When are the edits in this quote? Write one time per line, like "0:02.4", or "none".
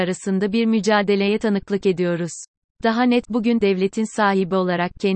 0:02.6
0:03.2
0:03.6